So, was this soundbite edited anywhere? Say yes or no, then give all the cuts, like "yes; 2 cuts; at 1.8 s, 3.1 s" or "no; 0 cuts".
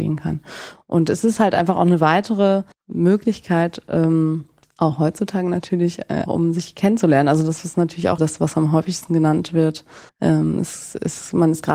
yes; 5 cuts; at 2.7 s, 4.6 s, 6.3 s, 8.2 s, 10.1 s